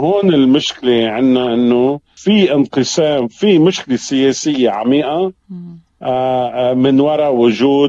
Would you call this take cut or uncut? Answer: uncut